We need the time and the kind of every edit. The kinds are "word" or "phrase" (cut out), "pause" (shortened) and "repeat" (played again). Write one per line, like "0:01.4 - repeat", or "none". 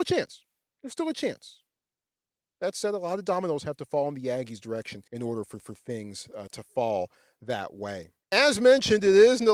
0:05.1 - pause
0:05.6 - repeat
0:08.2 - pause